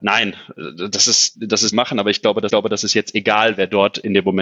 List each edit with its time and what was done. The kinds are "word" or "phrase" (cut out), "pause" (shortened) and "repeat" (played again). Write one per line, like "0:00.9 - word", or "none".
0:01.3 - word
0:01.7 - phrase
0:02.5 - repeat